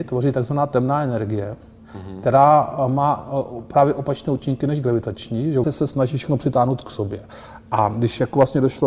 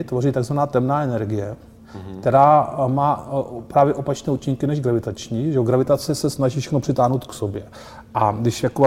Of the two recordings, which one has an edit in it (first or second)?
first